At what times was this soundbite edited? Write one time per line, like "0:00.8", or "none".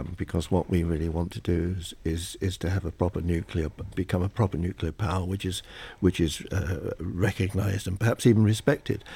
none